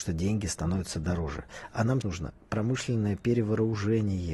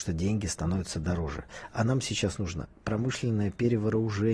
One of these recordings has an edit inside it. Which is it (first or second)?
first